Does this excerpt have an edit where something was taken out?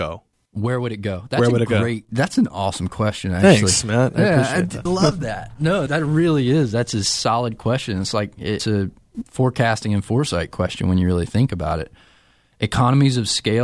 yes; 3 cuts; at 4.9 s, 5.9 s, 8.6 s

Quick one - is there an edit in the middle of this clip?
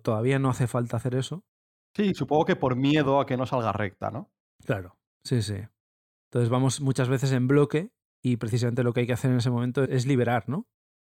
no; 0 cuts

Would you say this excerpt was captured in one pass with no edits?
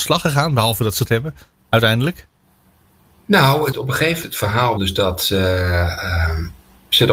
no; 4 cuts; at 1.1 s, 3.7 s, 4.2 s, 4.8 s

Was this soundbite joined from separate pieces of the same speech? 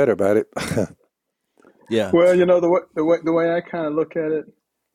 no; 0 cuts

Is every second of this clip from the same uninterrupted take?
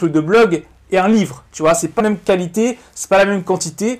no; 1 cut; at 2.0 s

